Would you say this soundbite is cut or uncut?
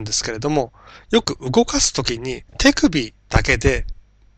cut